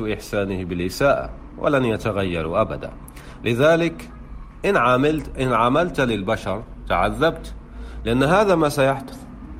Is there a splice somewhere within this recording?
no; 0 cuts

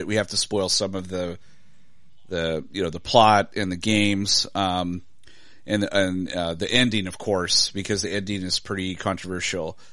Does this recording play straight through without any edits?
yes; 0 cuts

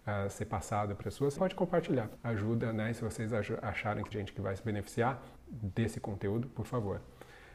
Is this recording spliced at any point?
yes; 5 cuts; at 1.0 s, 1.4 s, 2.2 s, 4.1 s, 5.4 s

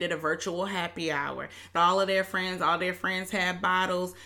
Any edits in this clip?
yes; 1 cut; at 1.8 s

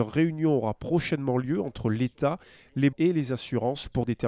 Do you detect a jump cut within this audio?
yes; 1 cut; at 2.9 s

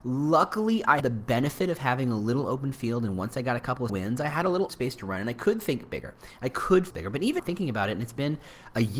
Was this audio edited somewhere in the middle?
yes; 5 cuts; at 1.0 s, 3.9 s, 4.7 s, 6.9 s, 7.4 s

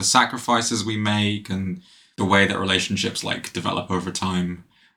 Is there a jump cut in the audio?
no; 0 cuts

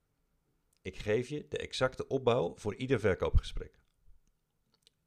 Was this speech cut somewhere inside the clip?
no; 0 cuts

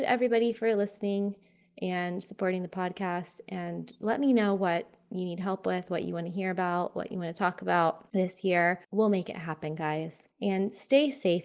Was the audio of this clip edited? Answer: yes; 2 cuts; at 8.8 s, 10.3 s

